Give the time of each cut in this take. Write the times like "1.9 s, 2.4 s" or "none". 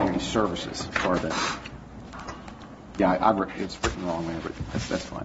1.2 s